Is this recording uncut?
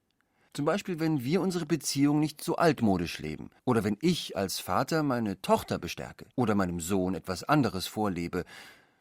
no; 2 cuts; at 3.6 s, 6.3 s

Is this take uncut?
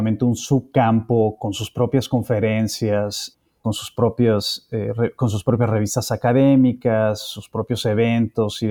yes; 0 cuts

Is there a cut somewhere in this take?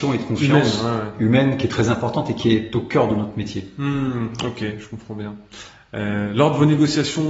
no; 0 cuts

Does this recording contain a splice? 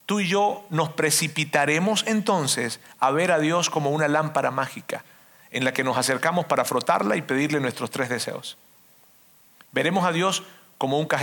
no; 0 cuts

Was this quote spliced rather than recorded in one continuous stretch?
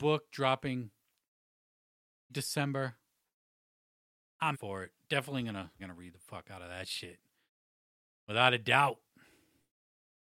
yes; 3 cuts; at 2.3 s, 4.5 s, 5.8 s

